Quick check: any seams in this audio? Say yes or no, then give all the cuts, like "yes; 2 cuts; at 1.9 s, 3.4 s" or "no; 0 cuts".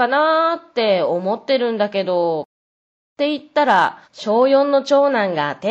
yes; 1 cut; at 4.0 s